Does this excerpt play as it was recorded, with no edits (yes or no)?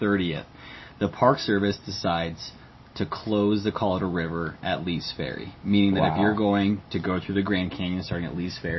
yes